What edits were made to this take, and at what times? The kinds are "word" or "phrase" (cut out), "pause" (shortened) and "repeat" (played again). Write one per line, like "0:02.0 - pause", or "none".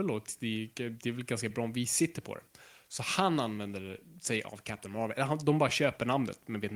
none